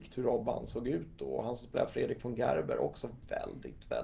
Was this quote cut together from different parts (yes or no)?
no